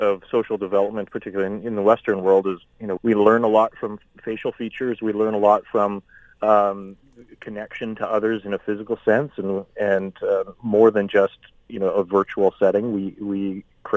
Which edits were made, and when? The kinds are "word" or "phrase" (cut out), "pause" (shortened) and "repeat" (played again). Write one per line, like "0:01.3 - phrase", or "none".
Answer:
0:03.0 - word